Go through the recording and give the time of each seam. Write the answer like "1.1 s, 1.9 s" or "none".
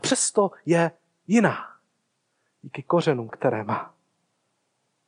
none

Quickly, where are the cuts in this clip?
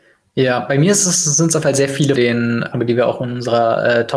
1.6 s, 2.1 s, 2.7 s

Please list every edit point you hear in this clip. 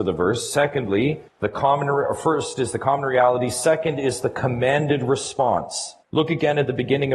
1.3 s, 6.0 s

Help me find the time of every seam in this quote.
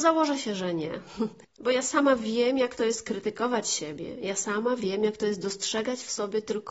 1.4 s

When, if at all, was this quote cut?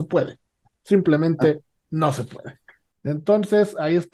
none

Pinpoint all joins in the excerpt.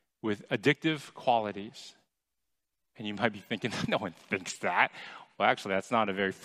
none

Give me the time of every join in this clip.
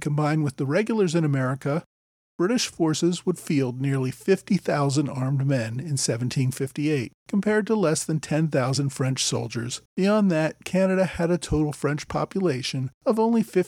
7.2 s, 9.9 s

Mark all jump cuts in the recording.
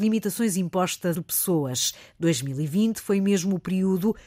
1.1 s

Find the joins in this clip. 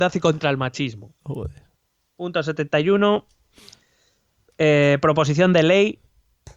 none

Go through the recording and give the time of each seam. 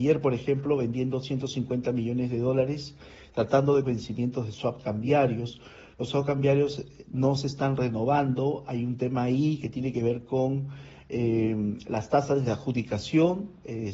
3.8 s

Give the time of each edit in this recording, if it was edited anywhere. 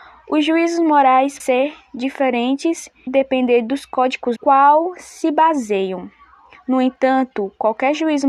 1.4 s, 3.1 s, 4.4 s

